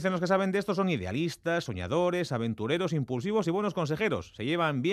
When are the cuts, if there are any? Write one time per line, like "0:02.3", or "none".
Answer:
none